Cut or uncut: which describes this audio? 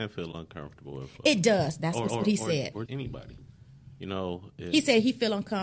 cut